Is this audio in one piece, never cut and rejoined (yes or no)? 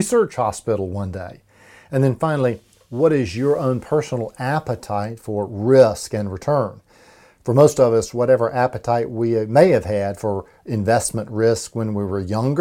yes